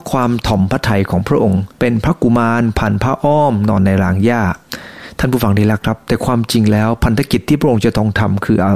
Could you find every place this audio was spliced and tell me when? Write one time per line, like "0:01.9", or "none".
0:01.7